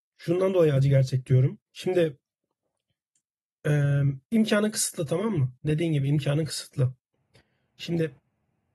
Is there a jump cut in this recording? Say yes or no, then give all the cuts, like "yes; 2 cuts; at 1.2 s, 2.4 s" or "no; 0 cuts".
yes; 2 cuts; at 1.7 s, 4.2 s